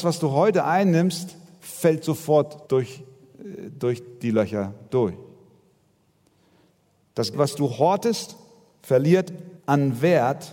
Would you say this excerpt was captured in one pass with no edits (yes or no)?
no